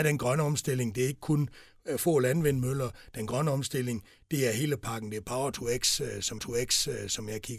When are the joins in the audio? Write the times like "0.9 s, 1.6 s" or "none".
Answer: 6.4 s